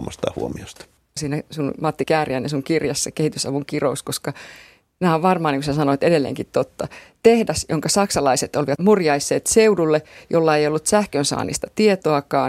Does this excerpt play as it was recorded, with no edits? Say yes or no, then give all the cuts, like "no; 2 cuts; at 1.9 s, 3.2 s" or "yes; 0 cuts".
no; 1 cut; at 1.2 s